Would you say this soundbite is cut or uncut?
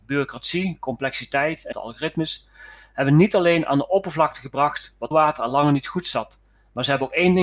cut